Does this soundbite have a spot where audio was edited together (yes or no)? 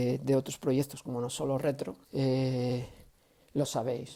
yes